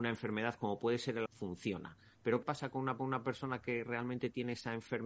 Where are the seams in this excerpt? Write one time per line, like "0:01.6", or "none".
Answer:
0:01.3
0:02.4
0:03.0